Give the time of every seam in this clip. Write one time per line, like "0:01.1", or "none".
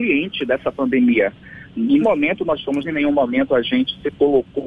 0:02.0
0:02.8